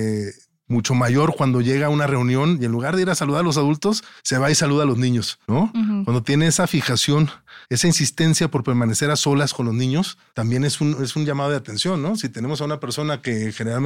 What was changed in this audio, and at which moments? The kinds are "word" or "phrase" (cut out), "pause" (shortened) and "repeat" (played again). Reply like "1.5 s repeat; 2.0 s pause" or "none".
4.2 s pause; 5.4 s pause; 7.6 s pause; 10.3 s pause